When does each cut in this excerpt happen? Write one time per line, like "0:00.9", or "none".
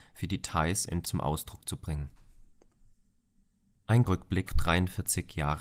0:01.0
0:04.0
0:04.5